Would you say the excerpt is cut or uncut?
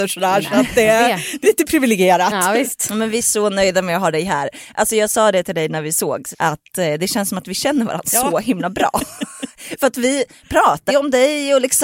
cut